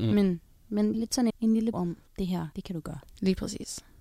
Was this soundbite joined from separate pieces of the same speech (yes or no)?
yes